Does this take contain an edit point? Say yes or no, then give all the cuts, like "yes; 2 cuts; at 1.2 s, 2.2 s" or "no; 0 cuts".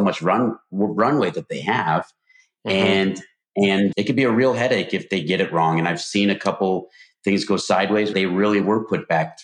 yes; 2 cuts; at 3.9 s, 8.1 s